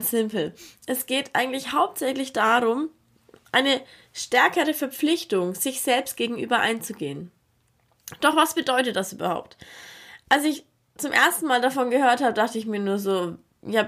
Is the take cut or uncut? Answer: uncut